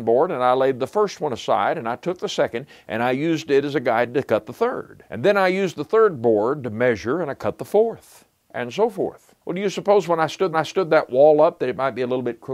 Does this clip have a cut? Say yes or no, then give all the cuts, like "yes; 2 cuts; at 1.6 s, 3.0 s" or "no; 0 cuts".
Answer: yes; 3 cuts; at 5.1 s, 9.4 s, 10.5 s